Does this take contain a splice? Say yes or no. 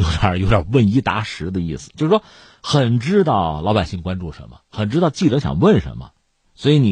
no